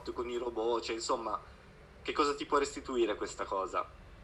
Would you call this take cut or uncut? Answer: uncut